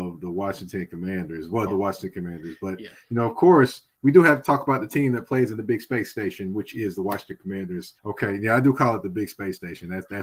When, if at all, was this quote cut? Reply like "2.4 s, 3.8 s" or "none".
1.7 s, 8.0 s